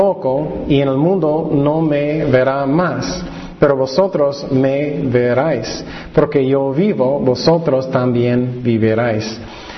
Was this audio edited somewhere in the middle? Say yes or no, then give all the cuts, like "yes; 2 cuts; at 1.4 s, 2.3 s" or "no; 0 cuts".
no; 0 cuts